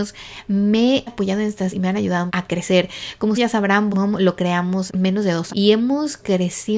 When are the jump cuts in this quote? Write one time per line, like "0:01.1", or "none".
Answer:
0:01.1
0:01.7
0:02.3
0:03.4
0:03.9
0:04.9
0:05.5